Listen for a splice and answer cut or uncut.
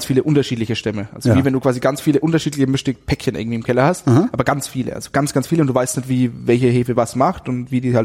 uncut